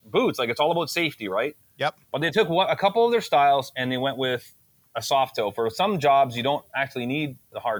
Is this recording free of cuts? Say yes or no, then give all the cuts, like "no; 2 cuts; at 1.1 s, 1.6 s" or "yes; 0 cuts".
yes; 0 cuts